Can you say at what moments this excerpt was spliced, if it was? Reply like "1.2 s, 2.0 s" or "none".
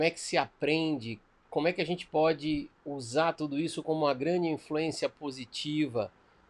none